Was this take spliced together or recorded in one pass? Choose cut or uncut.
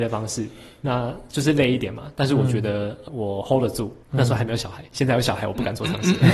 cut